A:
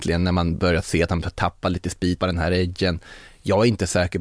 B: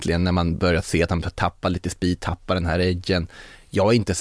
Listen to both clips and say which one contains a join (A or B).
A